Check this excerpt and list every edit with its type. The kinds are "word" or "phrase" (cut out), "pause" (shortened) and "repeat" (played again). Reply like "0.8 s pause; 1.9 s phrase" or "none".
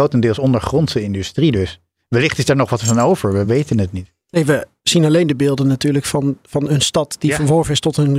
none